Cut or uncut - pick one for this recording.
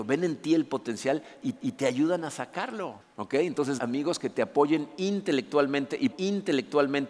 cut